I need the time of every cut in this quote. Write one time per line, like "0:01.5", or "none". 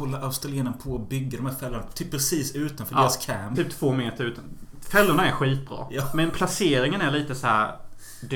0:03.5